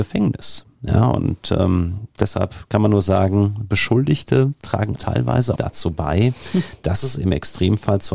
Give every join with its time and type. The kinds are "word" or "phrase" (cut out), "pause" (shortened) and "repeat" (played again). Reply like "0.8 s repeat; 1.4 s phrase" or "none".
5.0 s word; 5.6 s phrase